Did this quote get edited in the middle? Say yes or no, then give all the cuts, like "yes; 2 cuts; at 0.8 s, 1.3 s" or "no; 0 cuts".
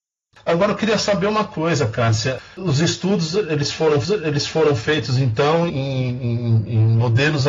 yes; 2 cuts; at 4.0 s, 5.7 s